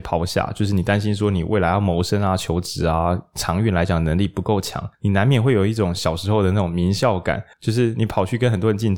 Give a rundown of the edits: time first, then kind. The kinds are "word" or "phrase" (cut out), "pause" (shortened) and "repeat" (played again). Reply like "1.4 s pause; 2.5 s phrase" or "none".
4.9 s pause; 7.5 s pause